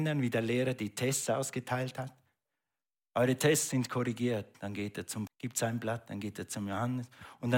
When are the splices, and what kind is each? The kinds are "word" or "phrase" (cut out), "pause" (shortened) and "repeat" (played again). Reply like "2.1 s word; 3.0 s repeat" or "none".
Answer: 5.3 s word